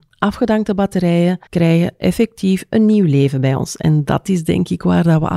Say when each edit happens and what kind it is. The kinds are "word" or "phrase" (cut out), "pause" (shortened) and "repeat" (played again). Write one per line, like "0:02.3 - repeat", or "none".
0:01.5 - pause